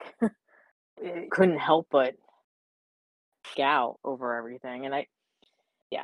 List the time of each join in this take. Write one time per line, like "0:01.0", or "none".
0:01.0
0:01.3
0:03.5
0:03.9